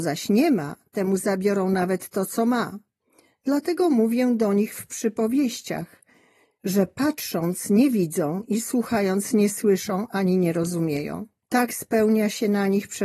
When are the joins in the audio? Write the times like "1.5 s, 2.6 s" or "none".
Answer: 11.4 s